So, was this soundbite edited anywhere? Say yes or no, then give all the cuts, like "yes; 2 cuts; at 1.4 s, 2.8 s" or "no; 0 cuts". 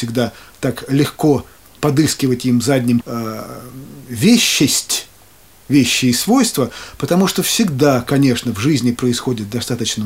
yes; 2 cuts; at 1.8 s, 3.0 s